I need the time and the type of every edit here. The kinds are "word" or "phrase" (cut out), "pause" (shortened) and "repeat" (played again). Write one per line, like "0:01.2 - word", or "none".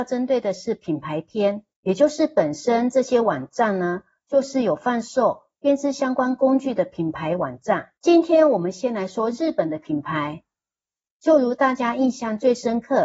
0:01.7 - pause
0:08.0 - pause